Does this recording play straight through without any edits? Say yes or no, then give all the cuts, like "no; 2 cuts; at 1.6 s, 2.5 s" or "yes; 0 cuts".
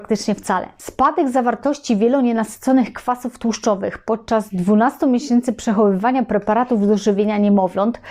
yes; 0 cuts